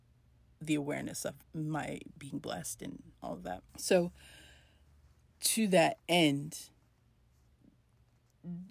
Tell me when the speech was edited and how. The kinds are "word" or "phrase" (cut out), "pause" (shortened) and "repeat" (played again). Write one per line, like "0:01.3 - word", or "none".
0:01.4 - pause
0:03.1 - pause
0:03.7 - pause